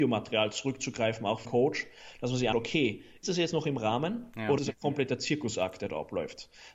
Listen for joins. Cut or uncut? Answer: cut